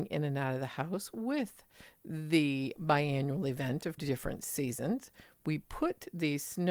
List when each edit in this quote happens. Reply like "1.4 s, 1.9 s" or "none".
2.8 s, 4.0 s